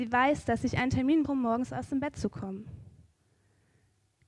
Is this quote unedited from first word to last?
no; 1 cut; at 1.3 s

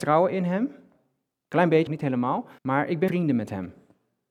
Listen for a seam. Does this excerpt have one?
yes; 3 cuts; at 1.9 s, 2.6 s, 3.1 s

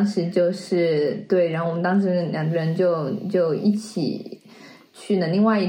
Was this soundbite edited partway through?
no; 0 cuts

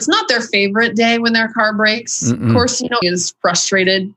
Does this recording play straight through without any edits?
no; 1 cut; at 3.0 s

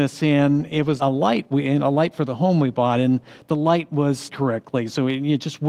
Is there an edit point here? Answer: yes; 2 cuts; at 1.0 s, 4.3 s

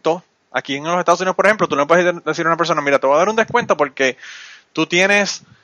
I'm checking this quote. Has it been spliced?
no; 0 cuts

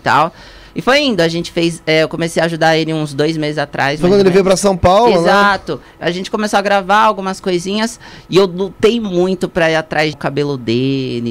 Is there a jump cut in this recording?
yes; 1 cut; at 10.1 s

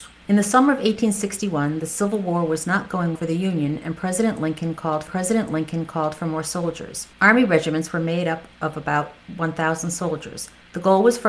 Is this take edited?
yes; 3 cuts; at 3.2 s, 5.1 s, 7.1 s

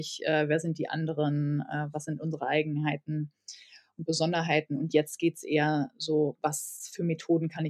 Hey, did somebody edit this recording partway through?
no; 0 cuts

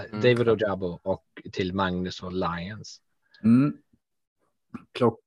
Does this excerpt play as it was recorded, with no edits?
yes; 0 cuts

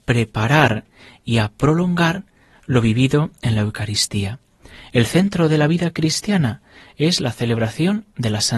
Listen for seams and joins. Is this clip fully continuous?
yes; 0 cuts

